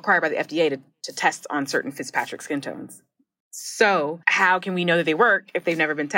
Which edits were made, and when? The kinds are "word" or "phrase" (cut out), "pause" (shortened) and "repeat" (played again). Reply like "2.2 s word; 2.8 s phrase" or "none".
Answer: 4.2 s pause

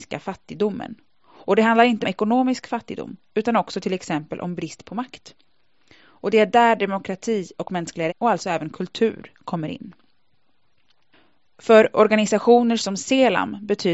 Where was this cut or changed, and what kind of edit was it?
2.0 s word; 8.1 s word

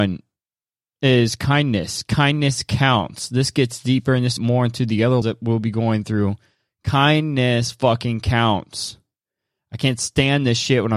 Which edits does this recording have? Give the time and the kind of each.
4.4 s phrase; 5.2 s word

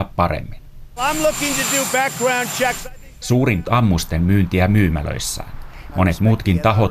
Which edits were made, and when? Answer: 3.6 s phrase

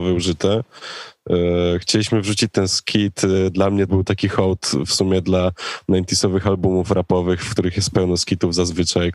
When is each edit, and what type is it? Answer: 3.9 s word

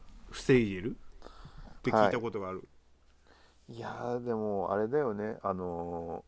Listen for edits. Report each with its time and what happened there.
none

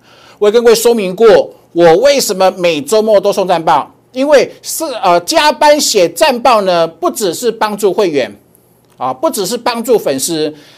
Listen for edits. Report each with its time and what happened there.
none

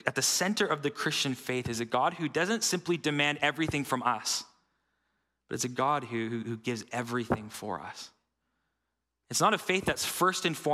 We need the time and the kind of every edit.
none

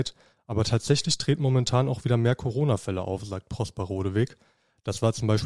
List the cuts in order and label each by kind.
none

